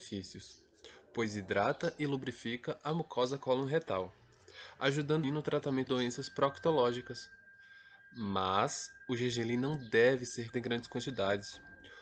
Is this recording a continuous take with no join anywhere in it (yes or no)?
no